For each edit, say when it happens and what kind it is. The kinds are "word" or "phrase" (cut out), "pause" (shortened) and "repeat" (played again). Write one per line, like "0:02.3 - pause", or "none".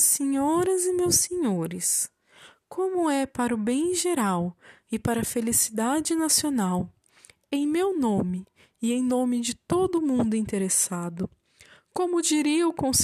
none